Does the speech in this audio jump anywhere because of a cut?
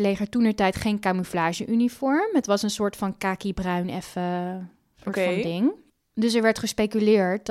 no; 0 cuts

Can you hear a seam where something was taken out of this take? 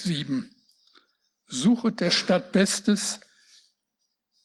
no; 0 cuts

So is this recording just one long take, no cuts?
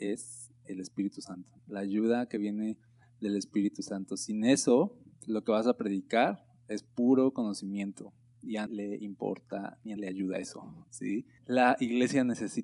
no; 3 cuts; at 1.6 s, 8.7 s, 10.0 s

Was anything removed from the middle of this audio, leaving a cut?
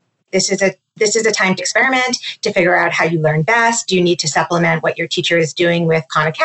yes; 1 cut; at 1.6 s

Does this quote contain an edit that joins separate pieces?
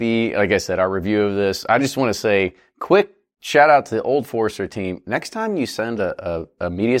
no; 0 cuts

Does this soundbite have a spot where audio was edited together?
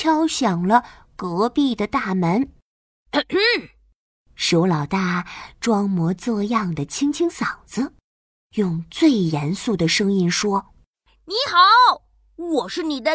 no; 0 cuts

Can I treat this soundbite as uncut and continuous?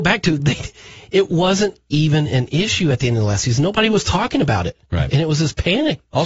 yes; 0 cuts

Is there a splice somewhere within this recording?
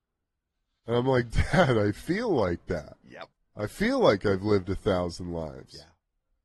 yes; 1 cut; at 3.3 s

